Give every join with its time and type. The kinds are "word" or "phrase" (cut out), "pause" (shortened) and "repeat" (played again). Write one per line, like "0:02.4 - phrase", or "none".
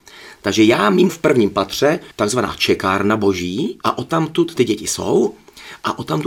0:01.1 - phrase
0:02.1 - pause
0:03.8 - phrase
0:04.6 - word